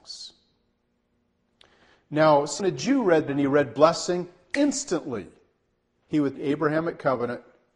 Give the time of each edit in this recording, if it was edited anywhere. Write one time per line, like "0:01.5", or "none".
0:02.6
0:03.3
0:06.4